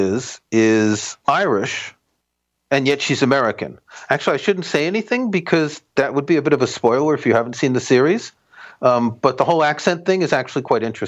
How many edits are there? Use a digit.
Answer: 1